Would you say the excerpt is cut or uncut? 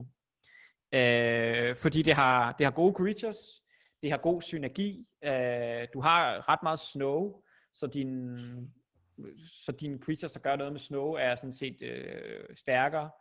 uncut